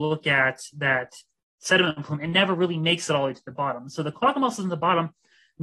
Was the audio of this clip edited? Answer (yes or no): no